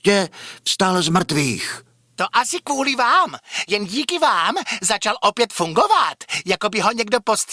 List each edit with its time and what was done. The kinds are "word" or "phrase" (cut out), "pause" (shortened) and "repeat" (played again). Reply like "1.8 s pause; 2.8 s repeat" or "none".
none